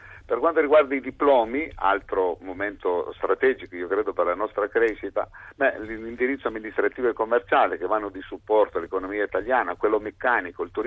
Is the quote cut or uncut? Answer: uncut